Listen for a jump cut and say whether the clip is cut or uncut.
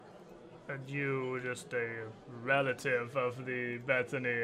uncut